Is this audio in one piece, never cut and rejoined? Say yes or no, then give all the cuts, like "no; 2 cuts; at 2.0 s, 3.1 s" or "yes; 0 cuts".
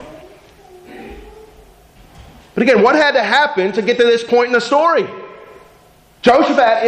yes; 0 cuts